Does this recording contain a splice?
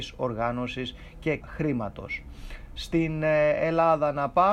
yes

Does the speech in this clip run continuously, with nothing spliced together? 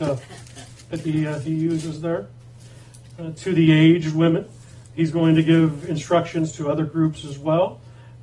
yes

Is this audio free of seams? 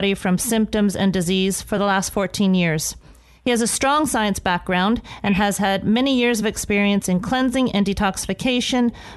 yes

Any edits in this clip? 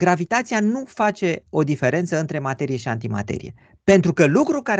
no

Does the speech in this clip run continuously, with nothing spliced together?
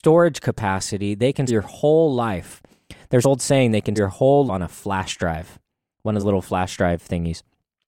no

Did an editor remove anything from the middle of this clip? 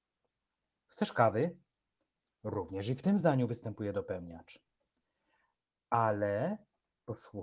no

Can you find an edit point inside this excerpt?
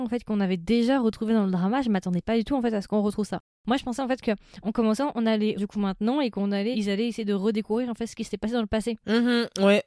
yes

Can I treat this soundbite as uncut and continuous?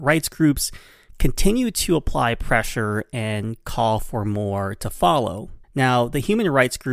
no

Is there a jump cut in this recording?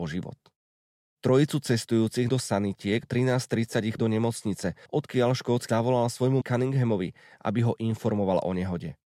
yes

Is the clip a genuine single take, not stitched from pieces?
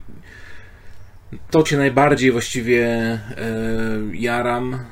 no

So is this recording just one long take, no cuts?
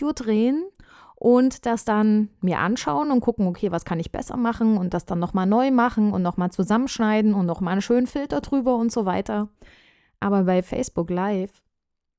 yes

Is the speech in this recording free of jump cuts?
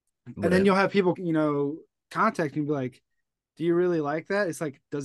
no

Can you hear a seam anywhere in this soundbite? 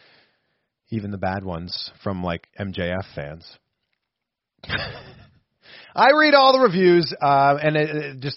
no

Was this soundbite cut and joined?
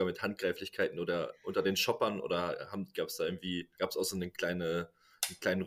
yes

